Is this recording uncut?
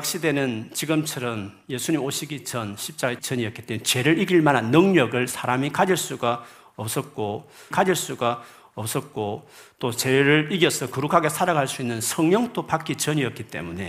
no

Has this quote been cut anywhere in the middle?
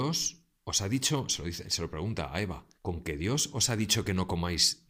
yes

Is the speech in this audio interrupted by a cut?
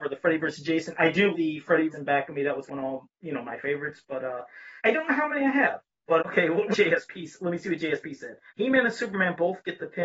yes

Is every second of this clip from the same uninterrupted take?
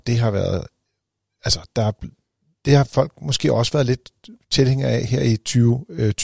yes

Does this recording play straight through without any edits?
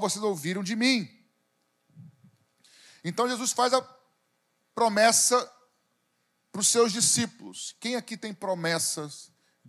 yes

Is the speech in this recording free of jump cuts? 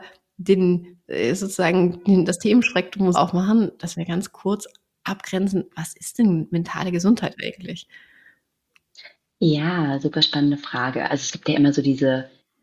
no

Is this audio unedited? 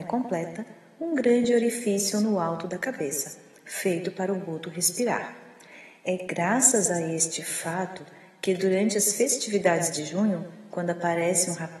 yes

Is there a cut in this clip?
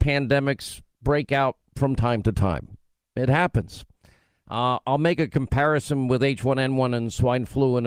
no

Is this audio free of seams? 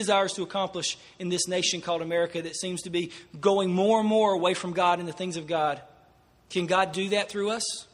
yes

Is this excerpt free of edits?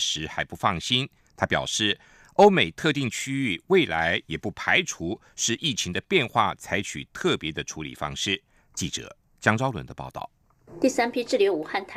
yes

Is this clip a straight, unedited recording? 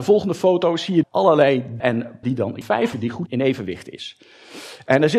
no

